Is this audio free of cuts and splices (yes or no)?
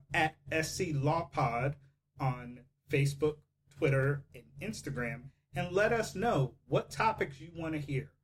yes